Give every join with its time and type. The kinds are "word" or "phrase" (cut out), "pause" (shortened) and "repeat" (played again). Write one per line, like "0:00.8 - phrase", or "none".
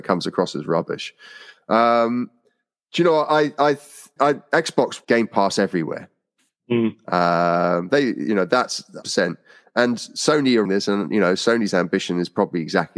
0:04.2 - word
0:05.0 - word
0:09.0 - word
0:10.6 - word